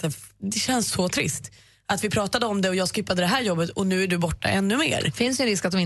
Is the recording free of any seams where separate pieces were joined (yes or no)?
yes